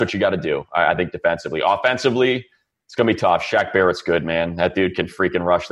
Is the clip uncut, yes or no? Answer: yes